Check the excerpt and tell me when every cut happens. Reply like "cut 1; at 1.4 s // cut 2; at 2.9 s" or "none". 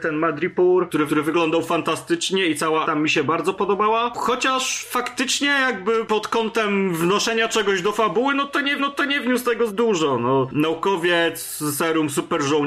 cut 1; at 1.1 s // cut 2; at 2.8 s // cut 3; at 8.8 s // cut 4; at 9.7 s